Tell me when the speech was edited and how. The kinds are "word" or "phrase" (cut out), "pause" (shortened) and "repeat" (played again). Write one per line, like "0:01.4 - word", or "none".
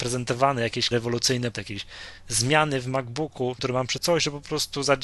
0:00.9 - word
0:01.5 - word
0:03.6 - word
0:04.0 - word